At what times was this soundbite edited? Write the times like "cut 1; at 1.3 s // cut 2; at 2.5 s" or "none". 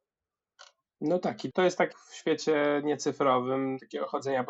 cut 1; at 1.5 s // cut 2; at 1.9 s